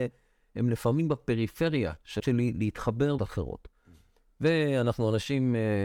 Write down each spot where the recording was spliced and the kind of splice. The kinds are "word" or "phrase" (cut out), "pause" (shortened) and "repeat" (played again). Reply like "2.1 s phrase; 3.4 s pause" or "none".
2.2 s word; 3.2 s word